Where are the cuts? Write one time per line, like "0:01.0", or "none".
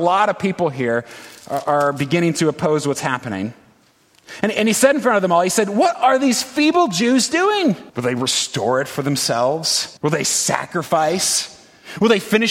0:07.9
0:10.0